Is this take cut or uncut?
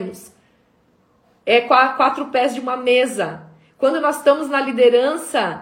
uncut